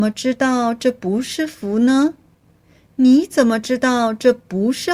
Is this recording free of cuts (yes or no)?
yes